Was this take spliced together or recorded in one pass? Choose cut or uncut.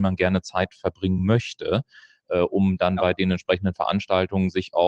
uncut